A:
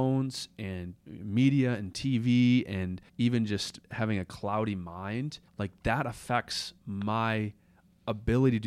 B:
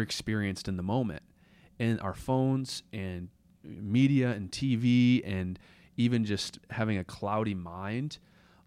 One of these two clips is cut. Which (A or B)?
A